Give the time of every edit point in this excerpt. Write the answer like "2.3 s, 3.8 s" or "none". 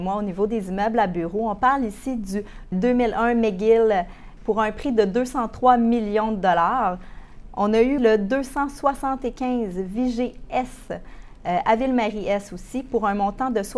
2.7 s, 4.4 s, 8.0 s